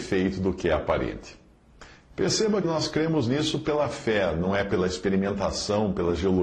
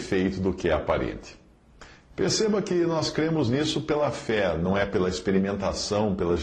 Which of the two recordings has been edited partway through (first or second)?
first